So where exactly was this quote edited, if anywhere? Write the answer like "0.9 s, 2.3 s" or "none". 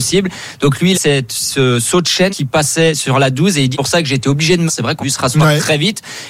0.9 s, 2.3 s, 3.7 s, 4.7 s, 5.0 s